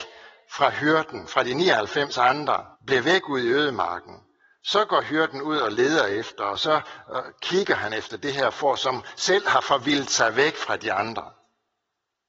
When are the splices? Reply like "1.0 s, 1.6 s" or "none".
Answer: 2.7 s